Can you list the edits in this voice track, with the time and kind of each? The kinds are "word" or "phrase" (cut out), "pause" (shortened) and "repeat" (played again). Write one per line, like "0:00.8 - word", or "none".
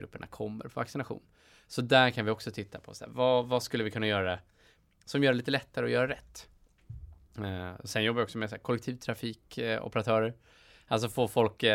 none